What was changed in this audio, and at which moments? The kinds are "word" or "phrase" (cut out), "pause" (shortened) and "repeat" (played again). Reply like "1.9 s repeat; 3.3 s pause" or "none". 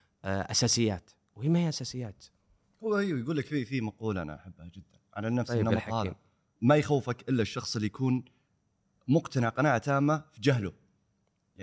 none